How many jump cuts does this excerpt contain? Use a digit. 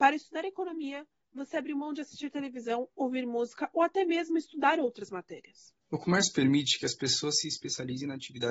1